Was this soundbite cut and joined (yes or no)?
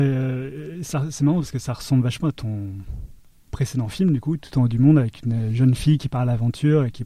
no